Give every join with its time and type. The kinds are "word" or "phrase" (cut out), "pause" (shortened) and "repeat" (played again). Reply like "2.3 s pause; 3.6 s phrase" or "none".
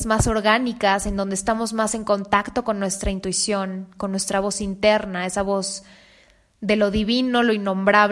none